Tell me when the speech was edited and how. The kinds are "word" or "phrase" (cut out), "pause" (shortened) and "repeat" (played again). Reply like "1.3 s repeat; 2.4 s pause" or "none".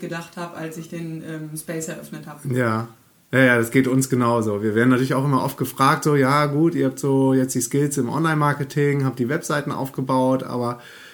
none